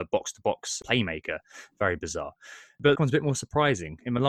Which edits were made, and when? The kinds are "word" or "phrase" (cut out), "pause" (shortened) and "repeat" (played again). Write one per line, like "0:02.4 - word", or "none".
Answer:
0:03.0 - phrase